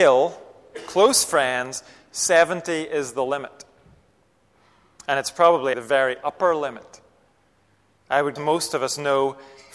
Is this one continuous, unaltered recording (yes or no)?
no